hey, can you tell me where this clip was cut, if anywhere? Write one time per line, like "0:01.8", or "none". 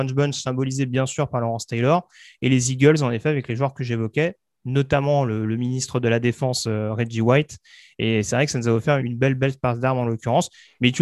0:09.0